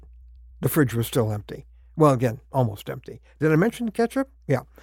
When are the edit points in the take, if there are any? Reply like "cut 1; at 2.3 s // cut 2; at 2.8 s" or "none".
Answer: none

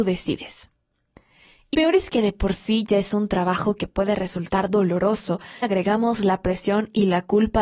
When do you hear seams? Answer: cut 1; at 1.7 s // cut 2; at 5.6 s

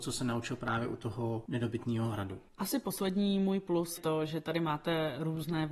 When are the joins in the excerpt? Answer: cut 1; at 2.5 s // cut 2; at 4.0 s

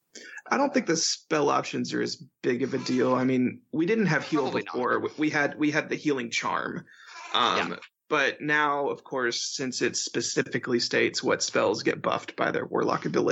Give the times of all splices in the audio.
none

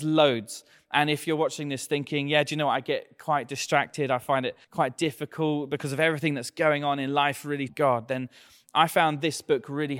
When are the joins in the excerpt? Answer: cut 1; at 4.6 s // cut 2; at 7.7 s

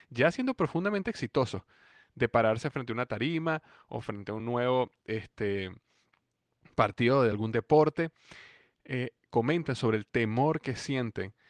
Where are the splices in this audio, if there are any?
none

